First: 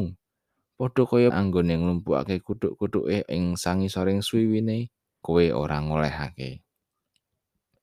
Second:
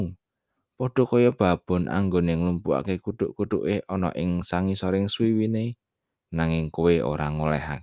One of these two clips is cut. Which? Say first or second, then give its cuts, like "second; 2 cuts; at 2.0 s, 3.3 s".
first; 3 cuts; at 1.3 s, 3.3 s, 5.2 s